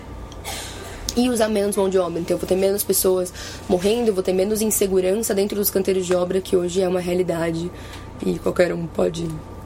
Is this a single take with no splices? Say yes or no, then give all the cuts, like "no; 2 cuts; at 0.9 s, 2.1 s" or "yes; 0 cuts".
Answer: yes; 0 cuts